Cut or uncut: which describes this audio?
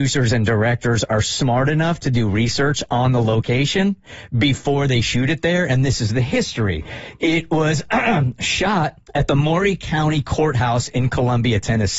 cut